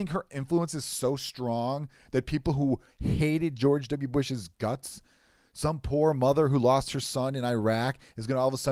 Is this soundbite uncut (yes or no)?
yes